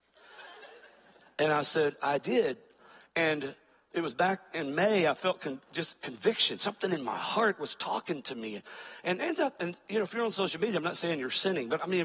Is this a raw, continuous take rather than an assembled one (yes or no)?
yes